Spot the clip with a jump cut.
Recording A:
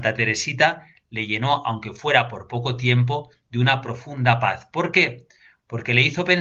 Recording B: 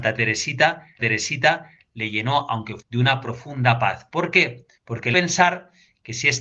B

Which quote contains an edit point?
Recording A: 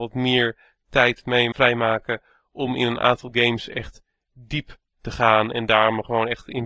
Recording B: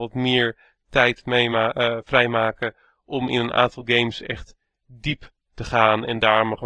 A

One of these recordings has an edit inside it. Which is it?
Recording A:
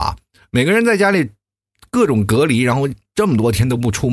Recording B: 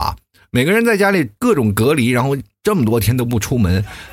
B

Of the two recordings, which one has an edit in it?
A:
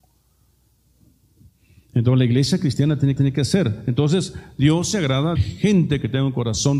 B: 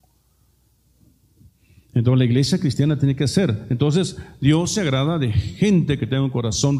A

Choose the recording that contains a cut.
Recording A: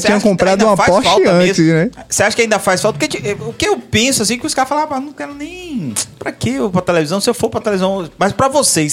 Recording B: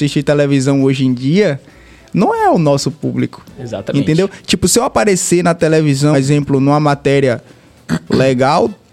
B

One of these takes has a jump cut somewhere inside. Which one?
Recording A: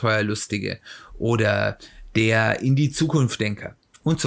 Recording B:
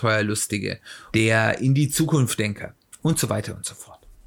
B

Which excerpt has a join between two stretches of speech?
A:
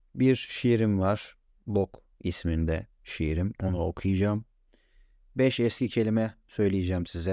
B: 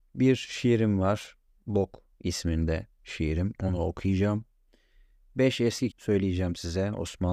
B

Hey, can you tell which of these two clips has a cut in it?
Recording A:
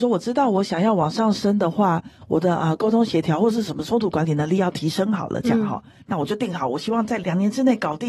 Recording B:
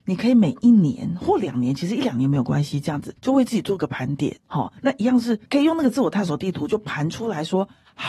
B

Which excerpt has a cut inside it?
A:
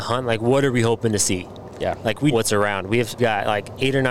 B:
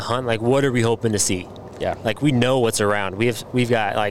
A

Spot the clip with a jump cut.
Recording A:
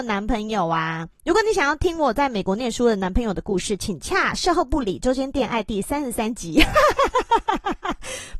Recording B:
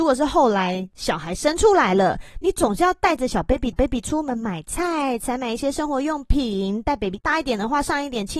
B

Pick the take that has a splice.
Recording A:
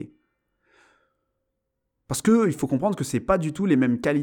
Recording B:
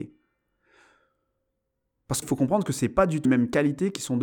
B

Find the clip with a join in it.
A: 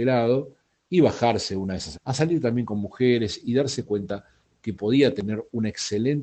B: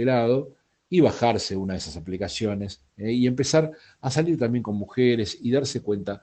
A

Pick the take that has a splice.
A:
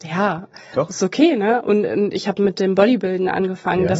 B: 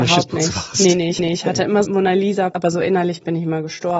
B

